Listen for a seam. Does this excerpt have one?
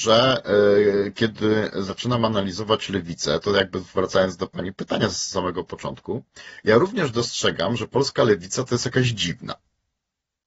no; 0 cuts

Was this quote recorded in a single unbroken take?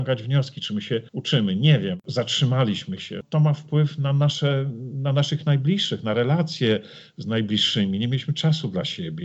no; 1 cut; at 1.1 s

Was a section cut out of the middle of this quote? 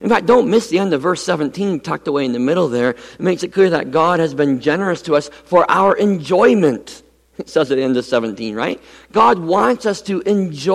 no; 0 cuts

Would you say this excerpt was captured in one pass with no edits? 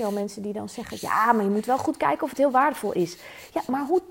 yes; 0 cuts

